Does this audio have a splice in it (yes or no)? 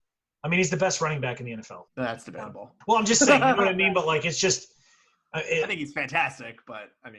yes